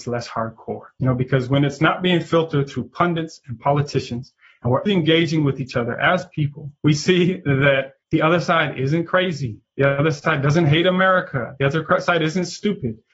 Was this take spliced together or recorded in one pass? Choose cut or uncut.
cut